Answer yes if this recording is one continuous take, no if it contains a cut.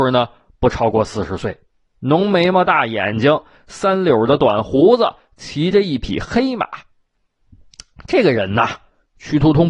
yes